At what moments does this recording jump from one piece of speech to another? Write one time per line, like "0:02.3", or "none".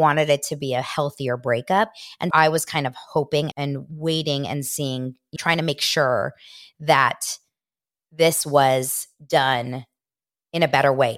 0:02.3
0:03.5
0:05.4